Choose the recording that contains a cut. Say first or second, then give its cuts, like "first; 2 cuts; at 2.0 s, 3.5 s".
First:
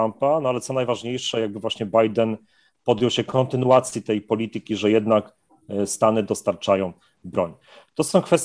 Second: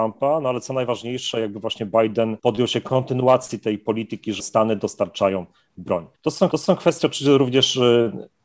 second; 4 cuts; at 2.4 s, 4.4 s, 6.2 s, 6.5 s